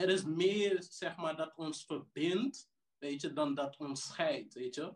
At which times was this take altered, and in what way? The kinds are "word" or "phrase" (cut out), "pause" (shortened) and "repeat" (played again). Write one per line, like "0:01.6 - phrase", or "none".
none